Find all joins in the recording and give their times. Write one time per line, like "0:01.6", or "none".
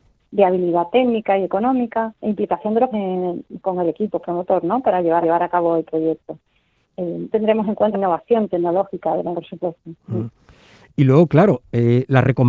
0:02.2
0:02.9
0:05.2
0:07.3
0:07.9
0:09.3
0:10.0